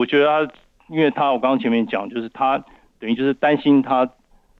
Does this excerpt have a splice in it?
no; 0 cuts

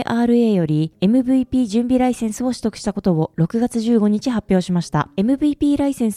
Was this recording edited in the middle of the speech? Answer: no; 0 cuts

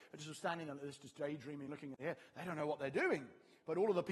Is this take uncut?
yes; 0 cuts

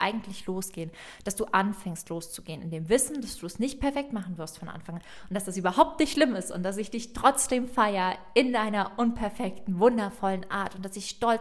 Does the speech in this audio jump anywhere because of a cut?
no; 0 cuts

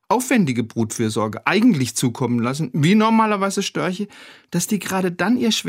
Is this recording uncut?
yes; 0 cuts

